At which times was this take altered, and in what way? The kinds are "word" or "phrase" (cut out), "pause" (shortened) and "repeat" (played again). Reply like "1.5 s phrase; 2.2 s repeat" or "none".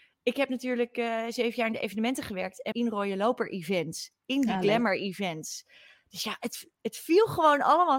2.7 s phrase